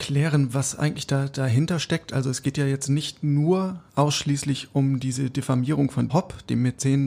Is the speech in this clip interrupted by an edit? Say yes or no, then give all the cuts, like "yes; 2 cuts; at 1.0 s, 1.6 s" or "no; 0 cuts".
yes; 2 cuts; at 3.9 s, 6.1 s